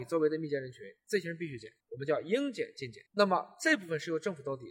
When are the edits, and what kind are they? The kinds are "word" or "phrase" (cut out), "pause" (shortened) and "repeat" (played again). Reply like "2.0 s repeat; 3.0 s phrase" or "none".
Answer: 1.8 s pause; 3.1 s pause